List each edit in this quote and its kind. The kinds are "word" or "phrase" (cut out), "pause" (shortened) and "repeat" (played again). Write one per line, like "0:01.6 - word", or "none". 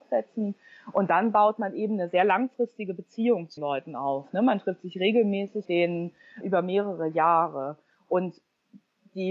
0:03.6 - word
0:05.7 - word
0:06.4 - word